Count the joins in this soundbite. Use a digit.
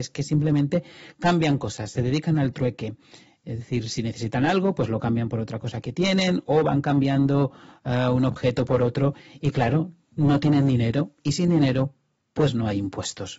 0